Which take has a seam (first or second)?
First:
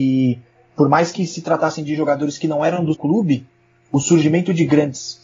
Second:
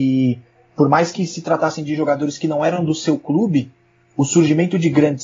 first